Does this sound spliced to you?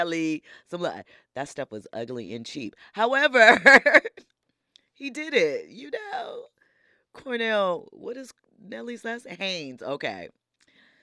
no; 0 cuts

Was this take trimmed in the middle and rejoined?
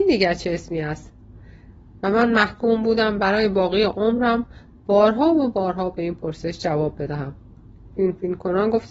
no; 0 cuts

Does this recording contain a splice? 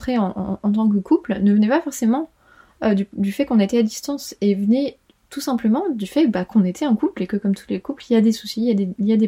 no; 0 cuts

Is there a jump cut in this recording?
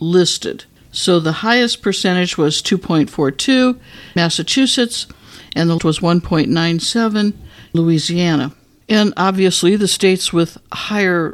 yes; 3 cuts; at 4.2 s, 5.8 s, 7.7 s

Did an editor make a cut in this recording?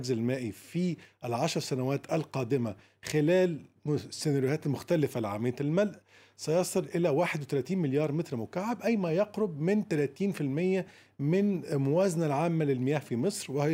no; 0 cuts

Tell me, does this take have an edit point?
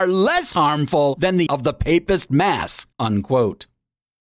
yes; 2 cuts; at 1.5 s, 2.9 s

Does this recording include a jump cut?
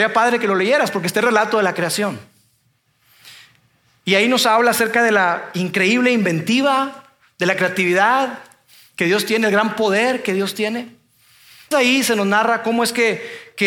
yes; 1 cut; at 11.7 s

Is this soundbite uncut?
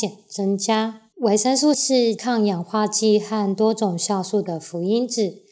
no; 2 cuts; at 1.1 s, 1.7 s

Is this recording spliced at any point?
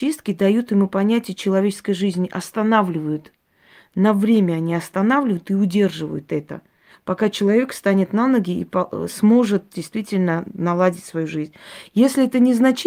no; 0 cuts

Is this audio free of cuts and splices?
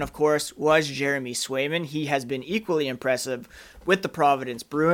yes; 0 cuts

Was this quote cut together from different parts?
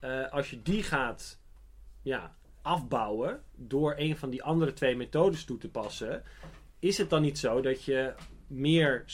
yes; 1 cut; at 2.6 s

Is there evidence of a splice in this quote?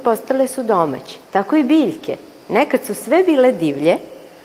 yes; 1 cut; at 1.2 s

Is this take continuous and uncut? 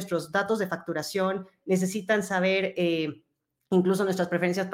yes; 0 cuts

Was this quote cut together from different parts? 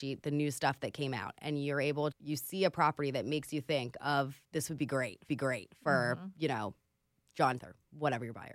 yes; 4 cuts; at 2.1 s, 4.4 s, 5.3 s, 7.6 s

